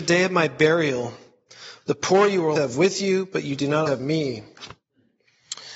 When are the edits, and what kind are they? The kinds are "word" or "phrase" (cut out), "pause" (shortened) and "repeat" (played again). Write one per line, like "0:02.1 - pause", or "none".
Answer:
0:02.6 - word
0:03.9 - word